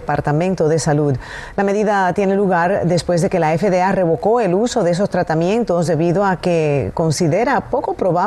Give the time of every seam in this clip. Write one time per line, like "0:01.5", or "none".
none